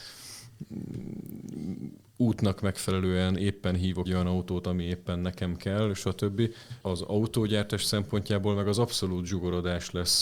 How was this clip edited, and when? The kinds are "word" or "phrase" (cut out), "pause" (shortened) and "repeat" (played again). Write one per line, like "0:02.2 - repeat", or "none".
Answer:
0:04.1 - word
0:06.8 - word